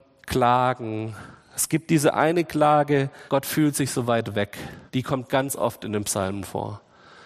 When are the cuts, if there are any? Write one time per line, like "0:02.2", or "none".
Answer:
0:03.3
0:04.9